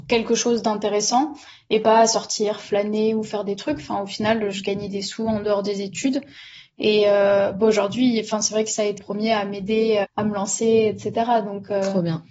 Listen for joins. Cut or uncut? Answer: cut